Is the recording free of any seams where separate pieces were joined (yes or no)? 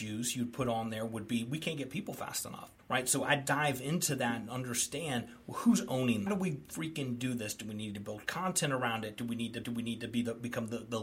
no